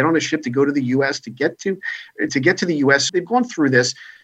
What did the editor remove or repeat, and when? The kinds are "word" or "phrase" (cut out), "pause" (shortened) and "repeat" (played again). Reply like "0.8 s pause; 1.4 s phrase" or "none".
2.3 s word; 3.1 s word